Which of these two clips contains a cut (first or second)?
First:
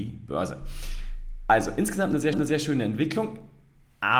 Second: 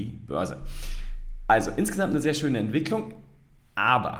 first